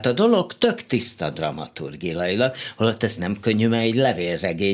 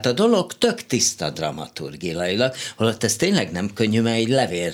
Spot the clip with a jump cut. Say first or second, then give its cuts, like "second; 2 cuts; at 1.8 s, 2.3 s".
first; 1 cut; at 3.2 s